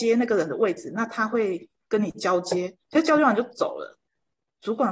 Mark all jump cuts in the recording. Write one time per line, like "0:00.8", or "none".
0:02.8